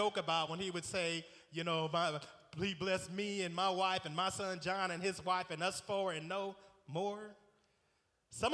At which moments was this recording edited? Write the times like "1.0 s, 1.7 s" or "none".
none